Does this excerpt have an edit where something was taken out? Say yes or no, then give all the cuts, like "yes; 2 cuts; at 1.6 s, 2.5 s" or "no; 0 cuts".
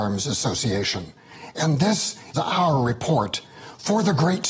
yes; 1 cut; at 2.3 s